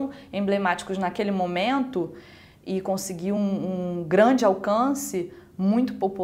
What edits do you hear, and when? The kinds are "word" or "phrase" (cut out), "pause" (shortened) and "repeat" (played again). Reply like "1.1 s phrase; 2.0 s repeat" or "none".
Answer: none